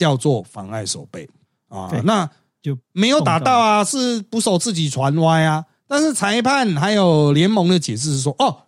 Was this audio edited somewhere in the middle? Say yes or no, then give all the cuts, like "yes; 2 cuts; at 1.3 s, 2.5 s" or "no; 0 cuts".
no; 0 cuts